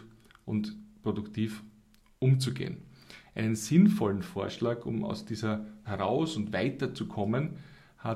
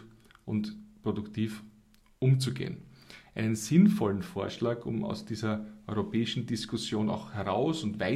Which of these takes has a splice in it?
first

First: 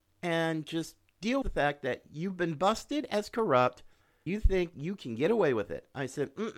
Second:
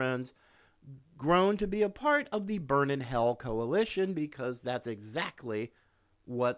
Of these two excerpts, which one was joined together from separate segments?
first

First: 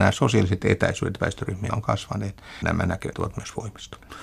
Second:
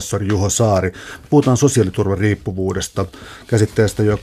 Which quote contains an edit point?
first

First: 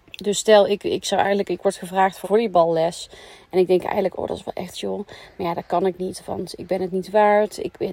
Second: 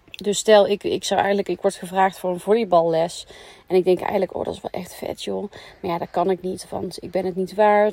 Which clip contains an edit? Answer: first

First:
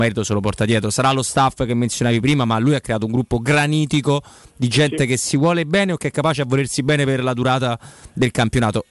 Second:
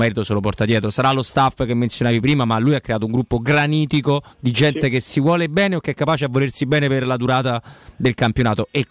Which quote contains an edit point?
second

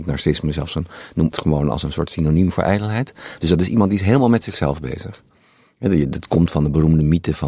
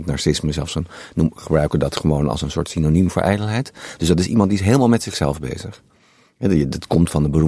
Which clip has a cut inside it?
first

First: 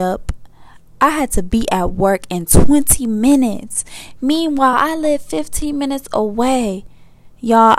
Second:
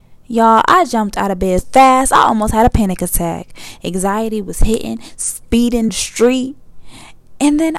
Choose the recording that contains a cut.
second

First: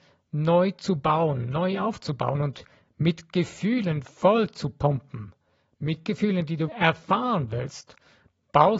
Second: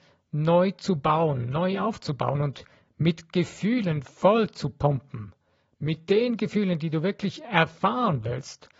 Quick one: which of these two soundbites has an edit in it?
first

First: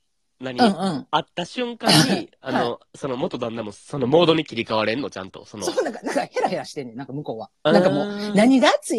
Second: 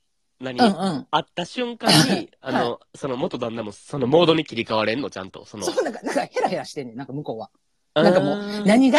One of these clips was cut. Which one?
first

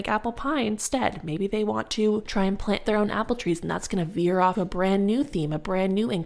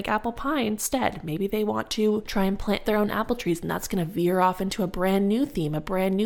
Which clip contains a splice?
first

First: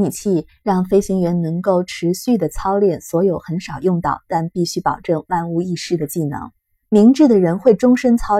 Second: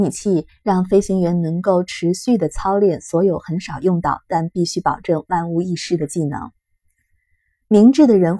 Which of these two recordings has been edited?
first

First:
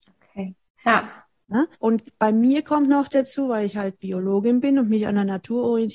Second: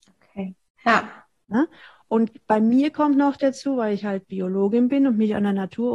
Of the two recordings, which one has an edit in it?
first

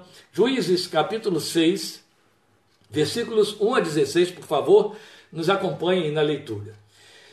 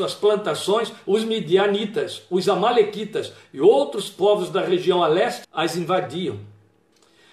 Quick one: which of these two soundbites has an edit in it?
second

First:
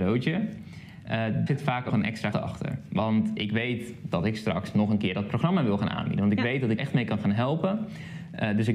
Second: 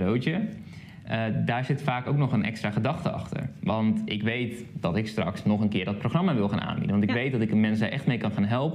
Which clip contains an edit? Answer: first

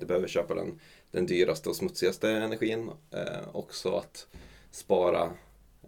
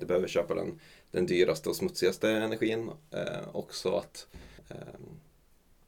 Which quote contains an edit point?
second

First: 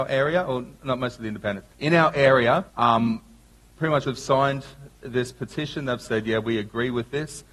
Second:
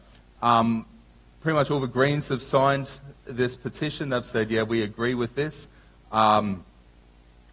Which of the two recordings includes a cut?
first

